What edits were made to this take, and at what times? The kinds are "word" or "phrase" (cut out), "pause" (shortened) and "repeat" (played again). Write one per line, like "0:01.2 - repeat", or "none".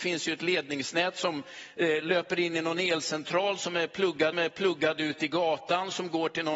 0:04.3 - repeat